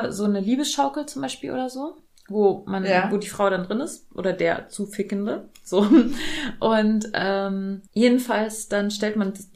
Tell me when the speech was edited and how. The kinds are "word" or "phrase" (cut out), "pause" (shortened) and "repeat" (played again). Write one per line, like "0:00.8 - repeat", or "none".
0:02.1 - pause
0:07.9 - pause